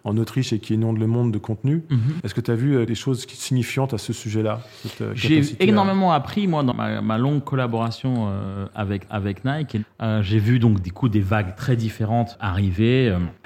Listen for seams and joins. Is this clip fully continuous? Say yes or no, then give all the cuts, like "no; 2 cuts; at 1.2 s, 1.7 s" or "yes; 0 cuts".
no; 2 cuts; at 6.7 s, 9.1 s